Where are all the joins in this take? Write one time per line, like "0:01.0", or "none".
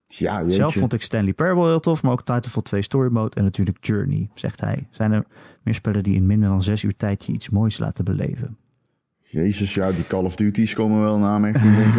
none